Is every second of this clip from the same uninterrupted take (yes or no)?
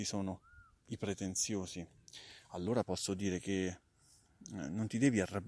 yes